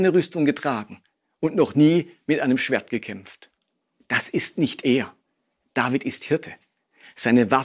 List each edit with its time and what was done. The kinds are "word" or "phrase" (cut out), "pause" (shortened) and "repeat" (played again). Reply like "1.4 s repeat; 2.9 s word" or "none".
none